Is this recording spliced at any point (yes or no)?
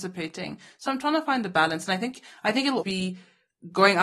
yes